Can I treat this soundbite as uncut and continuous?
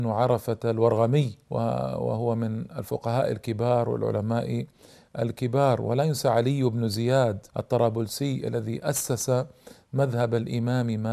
no; 2 cuts; at 1.4 s, 7.5 s

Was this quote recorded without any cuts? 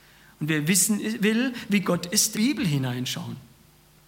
no; 1 cut; at 2.3 s

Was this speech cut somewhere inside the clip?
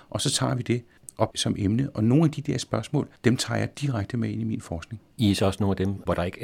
yes; 2 cuts; at 3.2 s, 5.1 s

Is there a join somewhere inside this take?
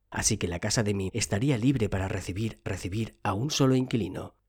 yes; 2 cuts; at 1.1 s, 2.7 s

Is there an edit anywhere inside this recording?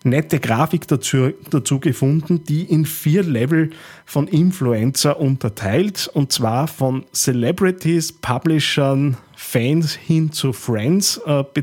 no; 0 cuts

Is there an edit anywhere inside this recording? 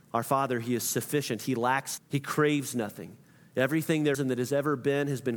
yes; 2 cuts; at 2.0 s, 4.1 s

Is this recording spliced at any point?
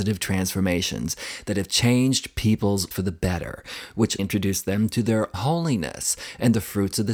yes; 3 cuts; at 2.9 s, 4.2 s, 5.3 s

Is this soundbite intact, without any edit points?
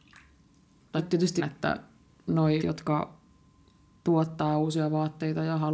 no; 3 cuts; at 1.0 s, 1.4 s, 2.6 s

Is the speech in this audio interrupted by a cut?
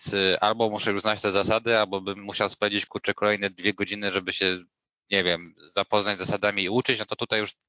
no; 0 cuts

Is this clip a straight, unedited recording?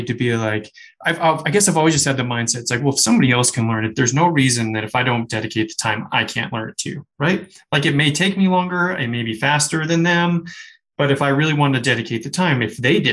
yes; 0 cuts

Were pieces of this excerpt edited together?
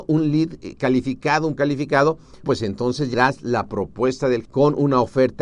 yes; 4 cuts; at 1.6 s, 2.4 s, 3.1 s, 4.5 s

